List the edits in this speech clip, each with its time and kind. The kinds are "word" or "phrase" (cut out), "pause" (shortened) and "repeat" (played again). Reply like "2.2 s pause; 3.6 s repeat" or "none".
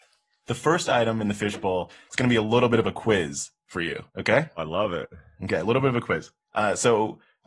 4.1 s pause; 6.4 s pause

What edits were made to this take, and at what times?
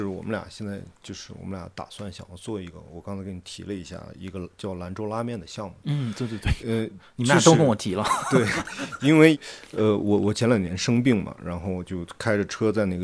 none

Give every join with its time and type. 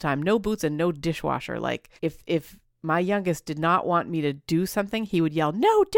2.0 s pause

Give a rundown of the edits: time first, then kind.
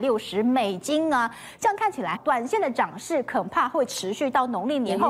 2.2 s word

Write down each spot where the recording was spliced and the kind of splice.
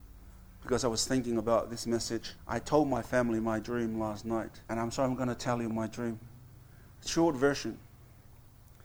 2.4 s pause; 4.6 s pause

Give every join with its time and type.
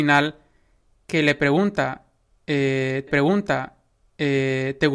3.1 s repeat

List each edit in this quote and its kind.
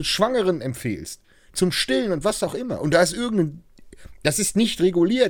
none

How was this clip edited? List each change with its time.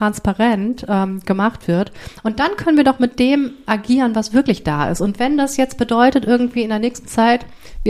none

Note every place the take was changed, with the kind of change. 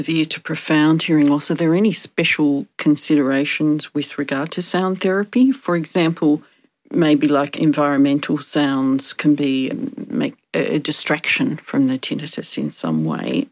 6.5 s pause

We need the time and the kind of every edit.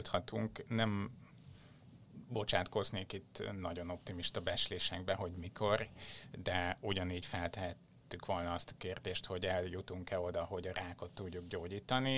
none

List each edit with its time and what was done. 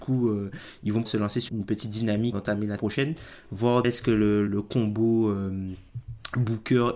1.1 s word; 1.5 s word; 2.3 s word; 2.8 s word; 3.8 s word; 4.5 s word

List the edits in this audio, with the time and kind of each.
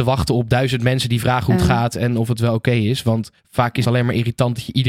3.4 s pause; 3.8 s word

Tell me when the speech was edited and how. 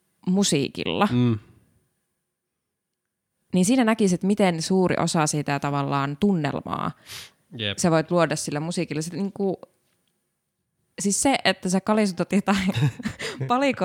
none

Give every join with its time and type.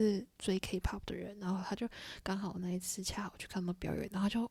none

